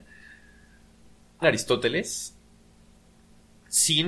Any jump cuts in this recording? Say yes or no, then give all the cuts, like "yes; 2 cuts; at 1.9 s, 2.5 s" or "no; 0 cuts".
yes; 1 cut; at 1.4 s